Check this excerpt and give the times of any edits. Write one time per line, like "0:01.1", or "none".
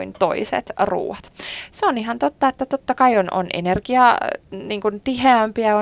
none